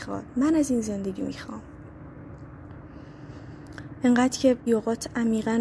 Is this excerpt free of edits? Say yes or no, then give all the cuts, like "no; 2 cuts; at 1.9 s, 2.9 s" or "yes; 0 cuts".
no; 2 cuts; at 1.2 s, 4.7 s